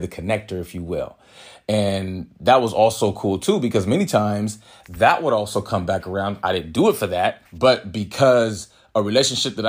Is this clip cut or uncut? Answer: cut